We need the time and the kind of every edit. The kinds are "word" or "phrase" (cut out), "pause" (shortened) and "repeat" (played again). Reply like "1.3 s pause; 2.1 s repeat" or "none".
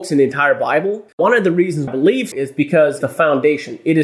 1.1 s pause; 1.9 s phrase; 2.3 s word; 3.0 s phrase